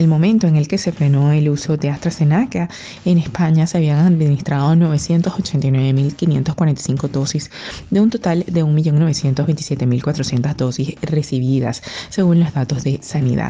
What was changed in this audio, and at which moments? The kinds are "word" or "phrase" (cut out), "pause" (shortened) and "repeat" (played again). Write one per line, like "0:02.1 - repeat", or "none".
none